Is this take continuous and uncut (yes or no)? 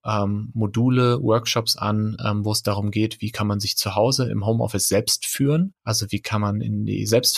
no